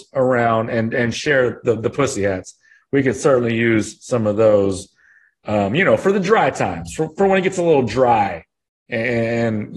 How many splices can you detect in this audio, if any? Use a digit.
0